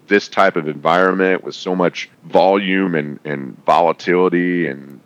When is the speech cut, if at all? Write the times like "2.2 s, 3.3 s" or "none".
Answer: 2.1 s